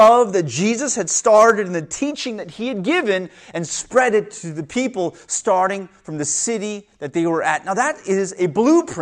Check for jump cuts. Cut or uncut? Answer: uncut